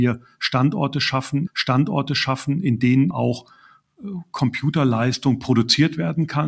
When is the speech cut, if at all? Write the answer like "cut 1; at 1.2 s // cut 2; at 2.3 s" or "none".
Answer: cut 1; at 1.5 s // cut 2; at 3.1 s